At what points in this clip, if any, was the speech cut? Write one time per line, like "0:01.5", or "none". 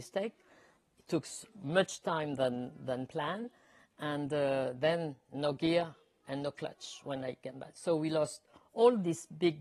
none